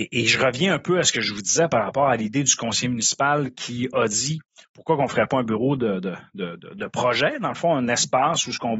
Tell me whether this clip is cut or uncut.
uncut